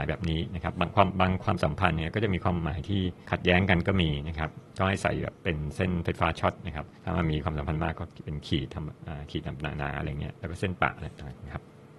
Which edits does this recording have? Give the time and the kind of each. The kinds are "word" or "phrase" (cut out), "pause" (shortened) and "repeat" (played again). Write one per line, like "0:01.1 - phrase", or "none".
0:03.2 - pause
0:07.0 - pause